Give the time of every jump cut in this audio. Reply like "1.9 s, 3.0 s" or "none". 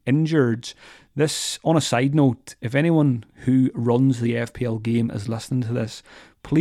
3.3 s